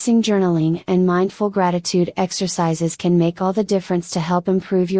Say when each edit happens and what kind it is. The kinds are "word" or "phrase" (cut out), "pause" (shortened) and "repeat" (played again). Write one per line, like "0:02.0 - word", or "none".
none